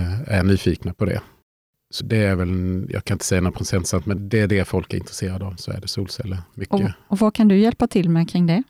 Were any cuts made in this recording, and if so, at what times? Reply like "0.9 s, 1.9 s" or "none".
2.0 s, 4.2 s